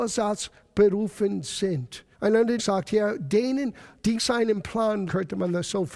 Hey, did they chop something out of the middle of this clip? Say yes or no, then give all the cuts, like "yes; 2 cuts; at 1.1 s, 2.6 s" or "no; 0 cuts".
yes; 4 cuts; at 2.1 s, 2.6 s, 4.2 s, 5.1 s